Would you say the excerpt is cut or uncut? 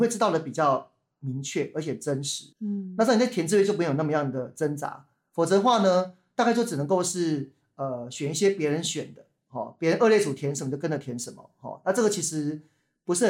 cut